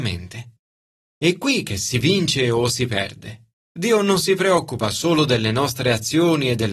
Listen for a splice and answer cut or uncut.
cut